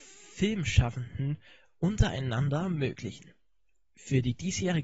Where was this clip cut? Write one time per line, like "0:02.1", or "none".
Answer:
none